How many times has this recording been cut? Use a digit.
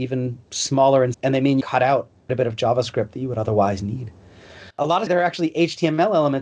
5